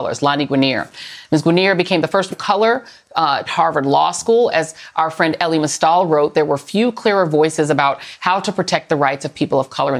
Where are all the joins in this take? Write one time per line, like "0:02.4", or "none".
0:02.3
0:03.5